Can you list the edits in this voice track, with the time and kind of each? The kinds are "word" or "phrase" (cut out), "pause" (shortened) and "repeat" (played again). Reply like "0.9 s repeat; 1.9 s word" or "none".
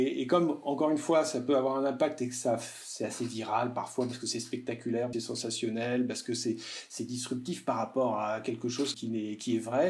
5.1 s phrase; 8.9 s word